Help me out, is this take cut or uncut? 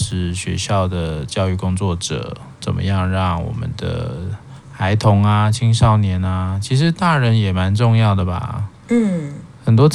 uncut